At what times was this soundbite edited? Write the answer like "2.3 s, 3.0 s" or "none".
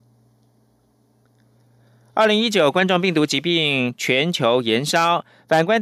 none